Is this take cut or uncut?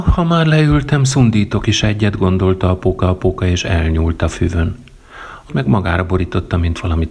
cut